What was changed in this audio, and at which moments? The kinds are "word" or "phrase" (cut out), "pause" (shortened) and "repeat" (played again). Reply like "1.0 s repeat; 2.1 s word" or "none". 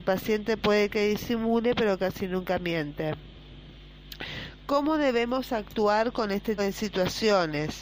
6.6 s word